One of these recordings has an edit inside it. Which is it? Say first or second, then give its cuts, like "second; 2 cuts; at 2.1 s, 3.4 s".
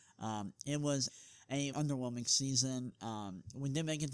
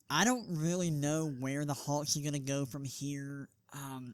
first; 2 cuts; at 1.1 s, 1.7 s